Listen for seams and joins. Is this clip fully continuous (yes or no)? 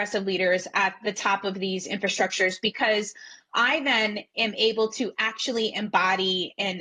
yes